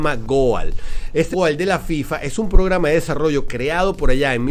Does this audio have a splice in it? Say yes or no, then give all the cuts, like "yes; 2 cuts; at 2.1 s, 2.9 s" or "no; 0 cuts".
yes; 1 cut; at 1.3 s